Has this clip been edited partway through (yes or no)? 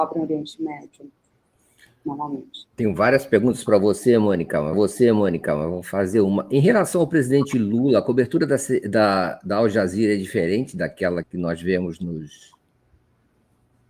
yes